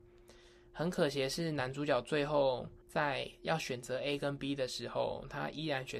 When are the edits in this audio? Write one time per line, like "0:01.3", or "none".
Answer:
0:02.8